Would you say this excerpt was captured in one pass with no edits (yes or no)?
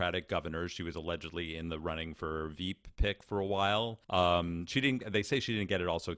no